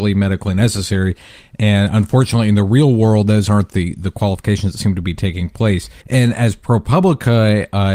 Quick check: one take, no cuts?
no; 1 cut; at 6.0 s

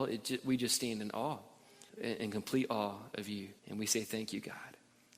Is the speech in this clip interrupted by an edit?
yes; 2 cuts; at 1.9 s, 3.6 s

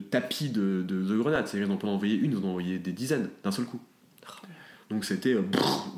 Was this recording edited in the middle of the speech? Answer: no; 0 cuts

